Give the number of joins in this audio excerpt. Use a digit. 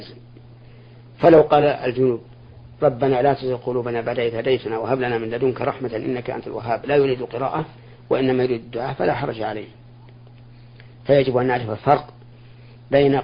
0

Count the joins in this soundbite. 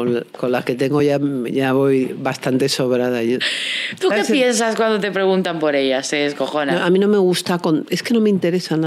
0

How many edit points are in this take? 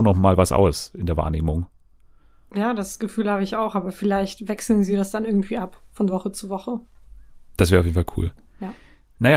0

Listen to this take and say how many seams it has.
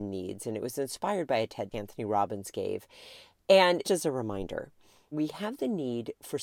3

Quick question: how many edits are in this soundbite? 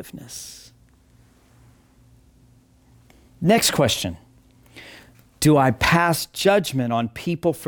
0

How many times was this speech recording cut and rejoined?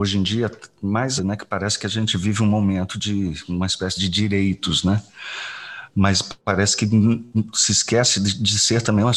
2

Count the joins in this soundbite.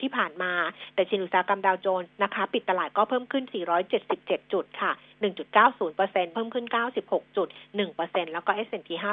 1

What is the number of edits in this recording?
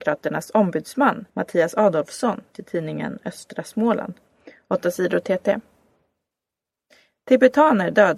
1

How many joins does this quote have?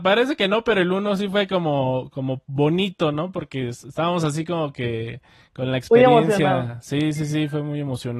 0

